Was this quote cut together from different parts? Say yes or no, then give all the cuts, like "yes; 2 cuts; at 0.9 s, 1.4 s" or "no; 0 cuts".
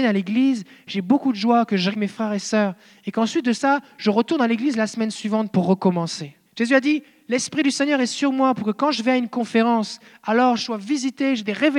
yes; 2 cuts; at 1.9 s, 6.5 s